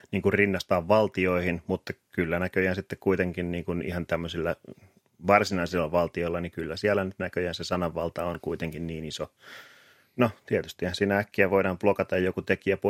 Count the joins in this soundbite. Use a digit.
0